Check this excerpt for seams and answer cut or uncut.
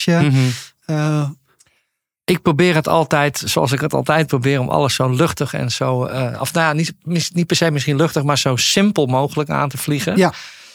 uncut